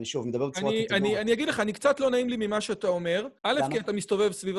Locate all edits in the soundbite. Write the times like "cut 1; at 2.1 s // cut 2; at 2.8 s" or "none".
cut 1; at 3.4 s